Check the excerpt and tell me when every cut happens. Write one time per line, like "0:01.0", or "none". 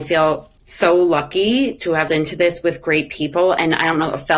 0:02.1

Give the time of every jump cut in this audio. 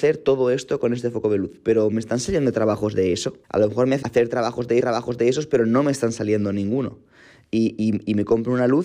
0:03.4
0:04.0
0:04.8

